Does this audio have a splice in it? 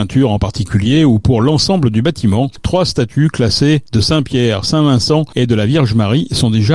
no; 0 cuts

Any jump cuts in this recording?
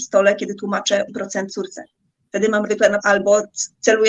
yes; 4 cuts; at 1.1 s, 1.5 s, 2.7 s, 3.0 s

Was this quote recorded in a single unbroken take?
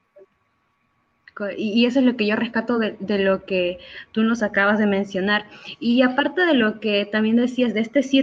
yes; 0 cuts

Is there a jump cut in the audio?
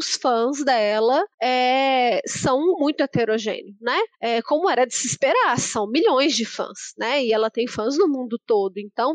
yes; 3 cuts; at 1.3 s, 2.7 s, 4.1 s

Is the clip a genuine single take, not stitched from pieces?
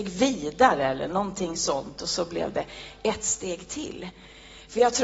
yes; 0 cuts

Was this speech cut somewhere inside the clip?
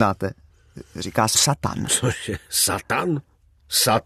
yes; 1 cut; at 1.3 s

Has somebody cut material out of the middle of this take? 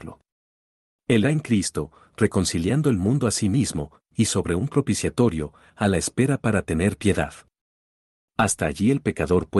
yes; 1 cut; at 1.2 s

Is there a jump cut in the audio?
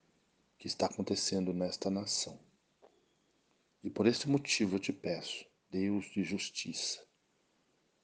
no; 0 cuts

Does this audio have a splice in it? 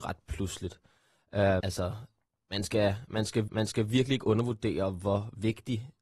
yes; 2 cuts; at 1.6 s, 3.5 s

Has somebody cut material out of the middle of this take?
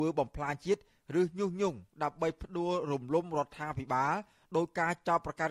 no; 0 cuts

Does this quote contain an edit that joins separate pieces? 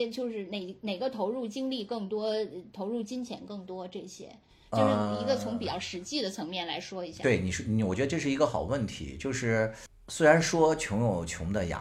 no; 0 cuts

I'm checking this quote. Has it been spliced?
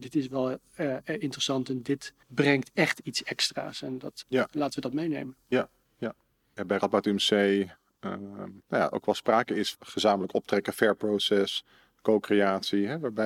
yes; 5 cuts; at 2.2 s, 4.2 s, 5.8 s, 8.6 s, 9.7 s

